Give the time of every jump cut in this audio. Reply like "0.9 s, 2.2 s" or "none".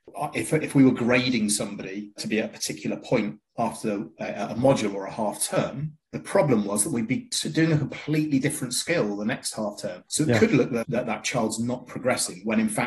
2.2 s, 6.1 s, 10.1 s, 10.8 s